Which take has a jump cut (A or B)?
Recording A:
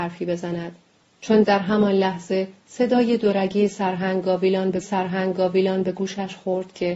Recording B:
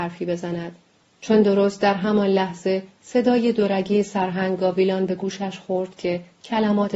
A